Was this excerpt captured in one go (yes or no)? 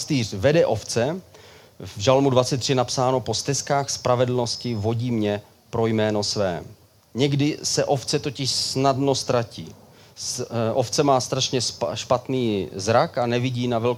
yes